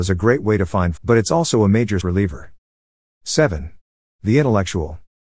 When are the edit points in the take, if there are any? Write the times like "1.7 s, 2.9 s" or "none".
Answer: 1.0 s, 2.0 s